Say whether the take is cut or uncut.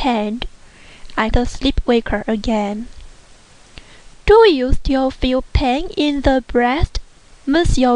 cut